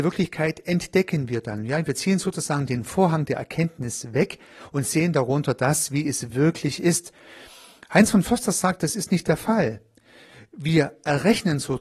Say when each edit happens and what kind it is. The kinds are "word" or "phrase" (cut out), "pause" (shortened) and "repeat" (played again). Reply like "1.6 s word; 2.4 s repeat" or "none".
none